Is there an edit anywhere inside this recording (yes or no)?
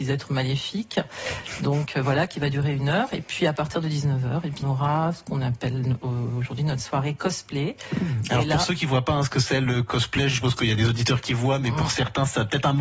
yes